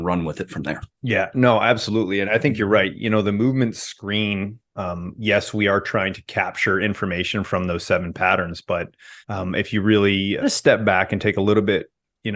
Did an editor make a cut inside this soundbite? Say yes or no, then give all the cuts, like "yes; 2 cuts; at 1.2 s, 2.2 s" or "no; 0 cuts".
yes; 5 cuts; at 1.0 s, 2.3 s, 4.6 s, 9.2 s, 10.4 s